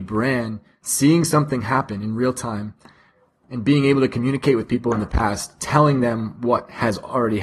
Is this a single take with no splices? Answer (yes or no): yes